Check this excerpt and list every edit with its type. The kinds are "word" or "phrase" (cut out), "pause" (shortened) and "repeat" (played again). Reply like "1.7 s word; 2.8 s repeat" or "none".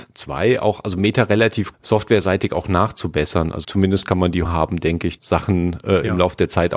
1.7 s word; 3.6 s word; 4.4 s word; 5.2 s word